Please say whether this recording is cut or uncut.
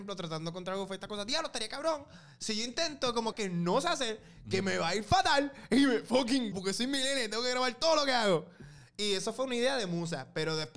cut